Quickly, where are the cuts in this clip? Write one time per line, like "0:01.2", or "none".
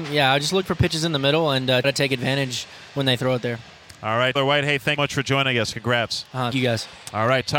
0:01.8
0:04.4
0:05.0
0:06.5